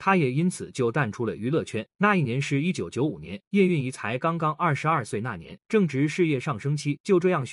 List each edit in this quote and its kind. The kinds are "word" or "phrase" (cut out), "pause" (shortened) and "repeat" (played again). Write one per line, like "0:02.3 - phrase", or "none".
0:01.9 - pause
0:03.5 - pause
0:05.6 - pause